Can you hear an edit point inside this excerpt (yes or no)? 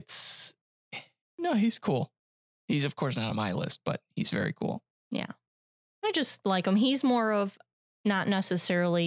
no